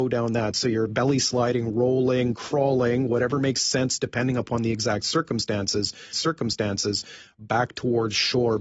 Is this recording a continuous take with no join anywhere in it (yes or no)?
no